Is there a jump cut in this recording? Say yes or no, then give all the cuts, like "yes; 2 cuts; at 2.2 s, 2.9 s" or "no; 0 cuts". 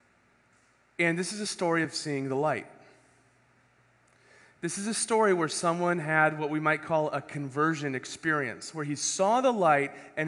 no; 0 cuts